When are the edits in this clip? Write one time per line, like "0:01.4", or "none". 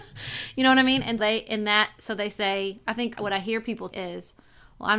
0:01.2
0:03.1
0:03.9